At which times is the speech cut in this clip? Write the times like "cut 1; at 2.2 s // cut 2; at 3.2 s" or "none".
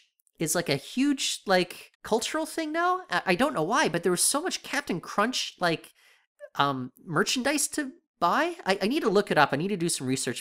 cut 1; at 1.9 s